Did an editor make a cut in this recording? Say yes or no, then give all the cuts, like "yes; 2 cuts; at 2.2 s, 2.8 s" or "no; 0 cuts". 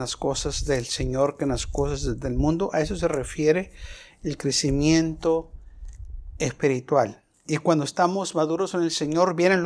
no; 0 cuts